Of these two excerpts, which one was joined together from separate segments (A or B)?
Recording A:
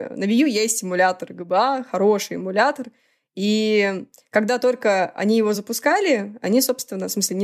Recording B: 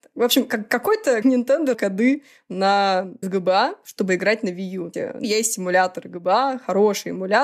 B